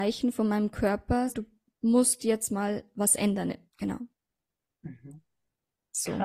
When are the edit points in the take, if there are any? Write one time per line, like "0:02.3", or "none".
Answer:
0:01.3
0:03.7